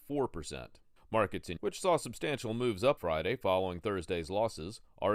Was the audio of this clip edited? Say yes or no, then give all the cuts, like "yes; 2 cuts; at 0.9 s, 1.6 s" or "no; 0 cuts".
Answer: yes; 3 cuts; at 1.0 s, 1.6 s, 3.0 s